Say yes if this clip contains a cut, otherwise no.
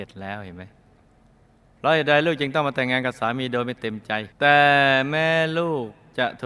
yes